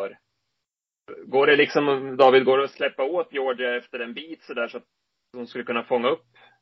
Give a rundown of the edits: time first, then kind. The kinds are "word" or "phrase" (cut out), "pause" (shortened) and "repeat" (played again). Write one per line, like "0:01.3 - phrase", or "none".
none